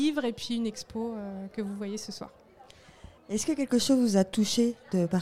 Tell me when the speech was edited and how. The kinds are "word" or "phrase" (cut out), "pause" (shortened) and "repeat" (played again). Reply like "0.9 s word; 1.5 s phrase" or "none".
3.2 s pause